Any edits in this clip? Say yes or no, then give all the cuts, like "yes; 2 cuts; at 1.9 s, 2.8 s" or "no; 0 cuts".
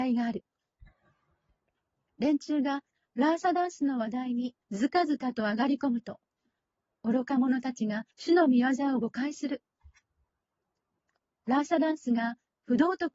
yes; 2 cuts; at 4.6 s, 8.1 s